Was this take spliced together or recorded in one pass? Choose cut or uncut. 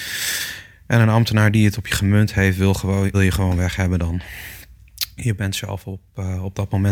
cut